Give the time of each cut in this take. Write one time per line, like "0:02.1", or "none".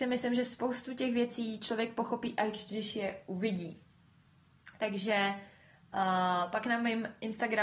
none